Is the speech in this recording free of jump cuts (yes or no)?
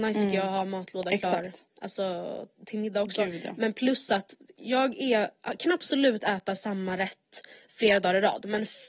yes